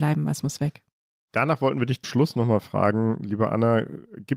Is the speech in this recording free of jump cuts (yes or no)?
no